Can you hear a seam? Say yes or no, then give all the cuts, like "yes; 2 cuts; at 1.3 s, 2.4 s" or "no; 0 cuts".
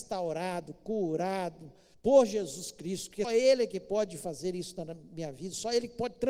yes; 2 cuts; at 1.9 s, 3.2 s